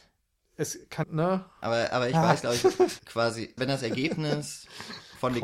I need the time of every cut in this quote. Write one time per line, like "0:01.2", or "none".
0:01.0
0:03.0
0:03.6